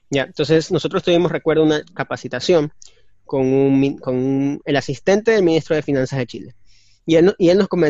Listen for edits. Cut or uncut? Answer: uncut